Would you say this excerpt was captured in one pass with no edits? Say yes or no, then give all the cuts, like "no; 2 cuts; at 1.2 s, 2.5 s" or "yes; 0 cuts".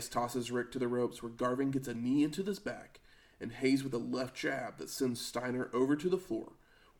yes; 0 cuts